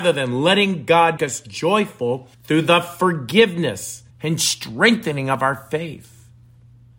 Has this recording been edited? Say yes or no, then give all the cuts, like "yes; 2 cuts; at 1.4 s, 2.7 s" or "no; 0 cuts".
yes; 3 cuts; at 1.2 s, 2.3 s, 4.1 s